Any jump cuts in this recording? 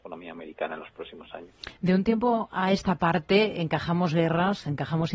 no; 0 cuts

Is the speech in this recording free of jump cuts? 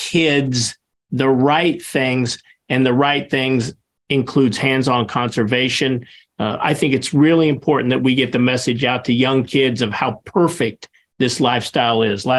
yes; 0 cuts

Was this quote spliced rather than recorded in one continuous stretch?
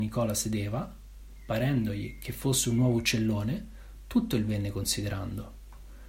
no; 0 cuts

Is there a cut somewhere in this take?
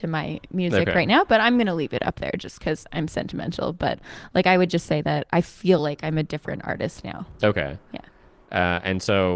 no; 0 cuts

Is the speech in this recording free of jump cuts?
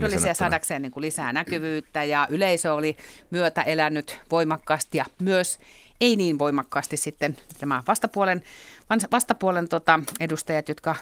yes; 0 cuts

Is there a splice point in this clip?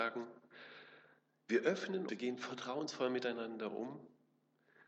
yes; 1 cut; at 2.1 s

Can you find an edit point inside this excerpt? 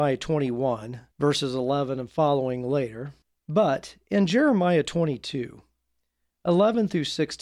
yes; 2 cuts; at 1.1 s, 3.2 s

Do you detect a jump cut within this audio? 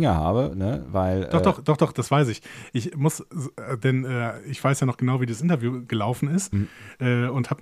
no; 0 cuts

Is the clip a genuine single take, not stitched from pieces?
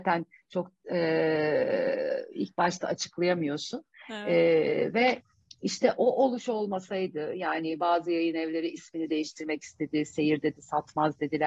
yes; 0 cuts

